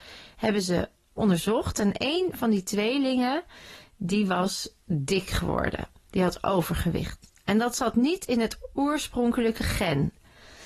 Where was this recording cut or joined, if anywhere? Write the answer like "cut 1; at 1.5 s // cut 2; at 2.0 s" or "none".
cut 1; at 4.8 s